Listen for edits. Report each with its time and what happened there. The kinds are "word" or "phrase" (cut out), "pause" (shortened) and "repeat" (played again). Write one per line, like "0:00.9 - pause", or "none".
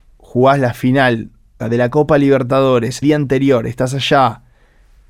0:01.6 - word
0:03.0 - word